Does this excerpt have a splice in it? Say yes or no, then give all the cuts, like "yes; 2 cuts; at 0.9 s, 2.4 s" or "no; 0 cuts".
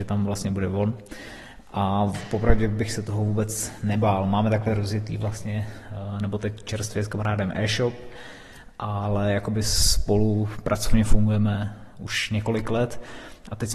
no; 0 cuts